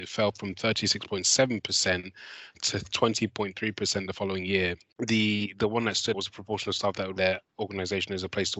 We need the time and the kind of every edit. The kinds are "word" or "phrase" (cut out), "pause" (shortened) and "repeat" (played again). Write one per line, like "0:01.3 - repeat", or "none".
0:04.9 - pause
0:06.1 - word
0:07.2 - word
0:07.5 - pause